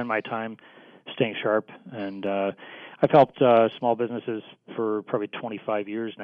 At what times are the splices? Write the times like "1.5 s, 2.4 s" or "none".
none